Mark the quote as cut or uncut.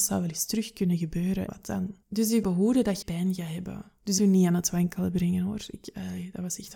cut